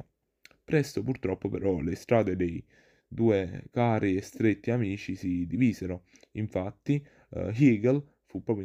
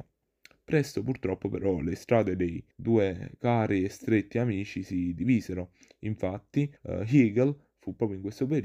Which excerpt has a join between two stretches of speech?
second; 2 cuts; at 2.7 s, 6.8 s

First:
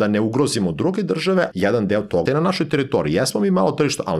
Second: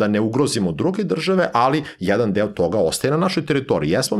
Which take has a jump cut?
first; 2 cuts; at 1.5 s, 2.3 s

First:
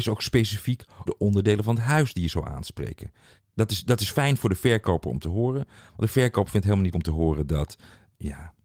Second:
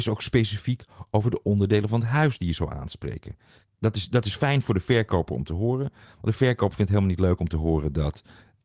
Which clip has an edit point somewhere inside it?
first; 2 cuts; at 1.1 s, 6.9 s

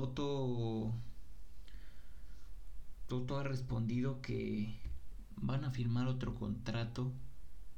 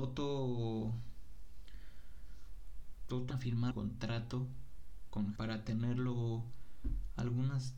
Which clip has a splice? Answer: second; 3 cuts; at 3.3 s, 3.7 s, 5.4 s

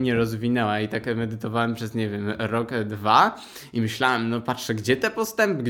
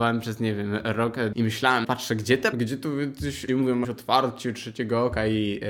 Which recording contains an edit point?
second; 5 cuts; at 1.3 s, 1.8 s, 2.5 s, 3.5 s, 3.8 s

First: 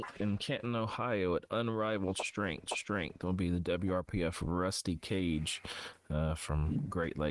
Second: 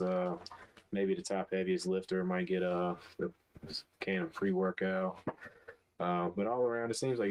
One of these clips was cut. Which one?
first; 1 cut; at 2.7 s

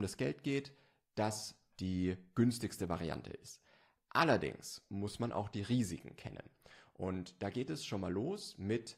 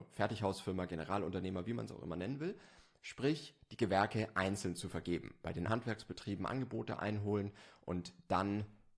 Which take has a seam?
second; 1 cut; at 5.7 s

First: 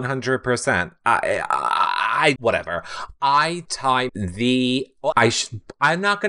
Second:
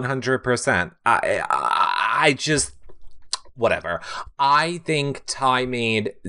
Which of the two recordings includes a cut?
first; 4 cuts; at 2.4 s, 3.7 s, 4.1 s, 5.1 s

